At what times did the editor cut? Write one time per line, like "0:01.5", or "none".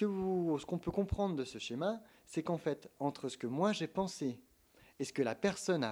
none